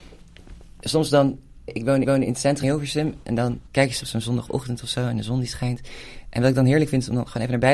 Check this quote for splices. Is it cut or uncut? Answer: cut